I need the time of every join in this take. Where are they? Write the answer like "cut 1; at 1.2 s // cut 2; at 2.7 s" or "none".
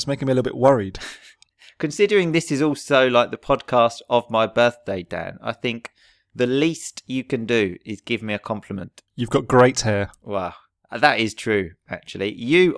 cut 1; at 9.1 s